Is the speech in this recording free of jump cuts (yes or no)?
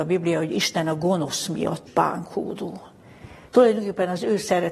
no